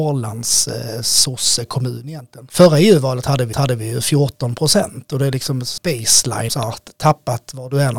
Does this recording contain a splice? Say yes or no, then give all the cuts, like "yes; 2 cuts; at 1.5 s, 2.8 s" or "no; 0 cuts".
yes; 3 cuts; at 3.5 s, 5.8 s, 6.5 s